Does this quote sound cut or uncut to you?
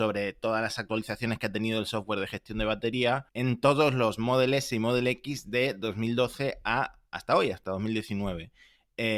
uncut